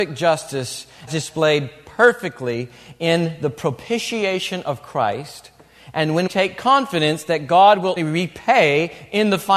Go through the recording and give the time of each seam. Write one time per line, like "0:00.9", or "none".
0:01.1
0:06.3
0:08.0